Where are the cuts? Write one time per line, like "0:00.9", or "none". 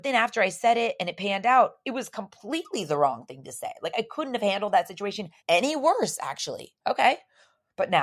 0:05.4
0:06.8